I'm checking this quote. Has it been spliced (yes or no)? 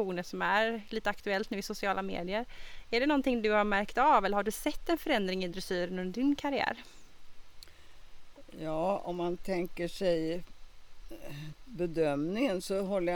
no